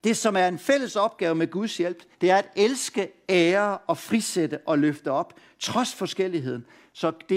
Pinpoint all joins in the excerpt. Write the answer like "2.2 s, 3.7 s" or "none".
2.1 s